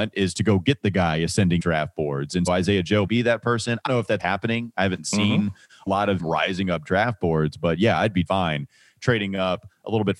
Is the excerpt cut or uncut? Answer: cut